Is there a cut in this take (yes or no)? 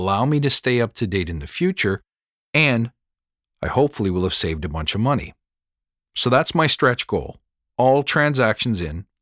no